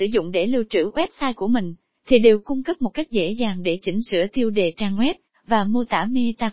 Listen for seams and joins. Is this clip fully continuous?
no; 1 cut; at 1.9 s

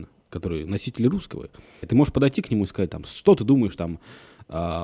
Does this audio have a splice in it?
yes; 1 cut; at 1.8 s

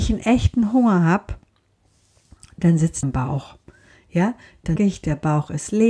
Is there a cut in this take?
yes; 2 cuts; at 3.0 s, 4.8 s

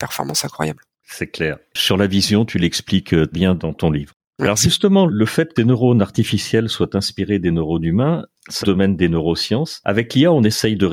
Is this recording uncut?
no; 5 cuts; at 0.9 s, 3.3 s, 5.1 s, 5.6 s, 8.6 s

